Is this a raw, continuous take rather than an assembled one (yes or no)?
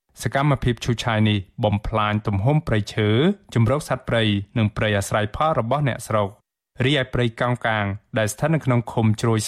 yes